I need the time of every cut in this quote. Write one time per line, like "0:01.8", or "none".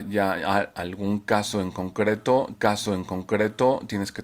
0:02.5